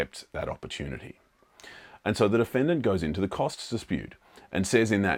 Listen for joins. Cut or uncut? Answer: uncut